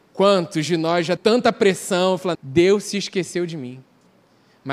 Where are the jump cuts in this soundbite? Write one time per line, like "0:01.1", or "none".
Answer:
0:01.2
0:02.3